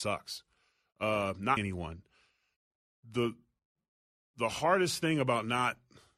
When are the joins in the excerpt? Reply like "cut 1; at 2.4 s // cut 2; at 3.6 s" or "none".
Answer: cut 1; at 1.6 s